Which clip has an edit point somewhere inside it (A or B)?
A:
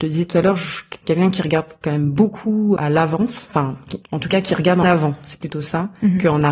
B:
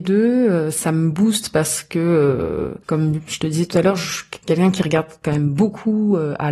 A